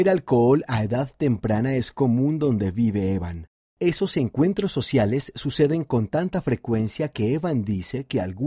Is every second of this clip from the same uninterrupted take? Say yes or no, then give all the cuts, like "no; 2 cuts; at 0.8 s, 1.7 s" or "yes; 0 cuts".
yes; 0 cuts